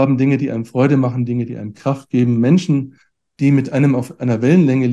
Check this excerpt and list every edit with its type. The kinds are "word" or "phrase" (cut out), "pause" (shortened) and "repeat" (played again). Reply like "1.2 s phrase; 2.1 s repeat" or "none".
none